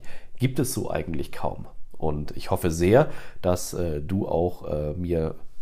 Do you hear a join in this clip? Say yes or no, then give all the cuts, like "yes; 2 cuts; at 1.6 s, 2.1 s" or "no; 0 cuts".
no; 0 cuts